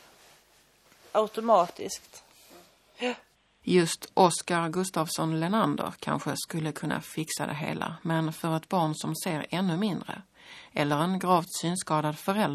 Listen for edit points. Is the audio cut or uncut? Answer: uncut